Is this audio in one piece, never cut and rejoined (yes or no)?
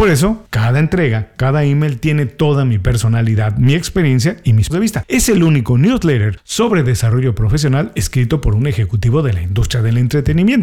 no